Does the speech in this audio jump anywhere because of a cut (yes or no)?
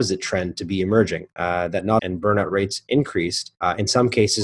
yes